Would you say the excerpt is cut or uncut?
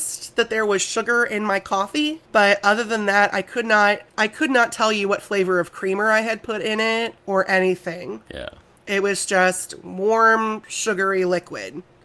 cut